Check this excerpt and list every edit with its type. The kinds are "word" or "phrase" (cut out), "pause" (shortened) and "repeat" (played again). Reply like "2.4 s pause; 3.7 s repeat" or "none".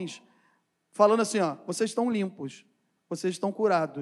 none